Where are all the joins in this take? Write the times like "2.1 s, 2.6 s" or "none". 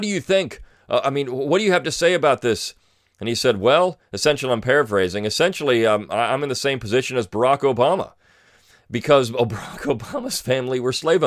none